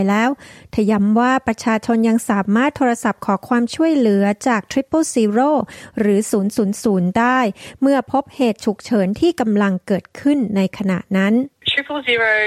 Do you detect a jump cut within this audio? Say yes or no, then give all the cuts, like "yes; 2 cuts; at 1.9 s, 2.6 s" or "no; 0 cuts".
no; 0 cuts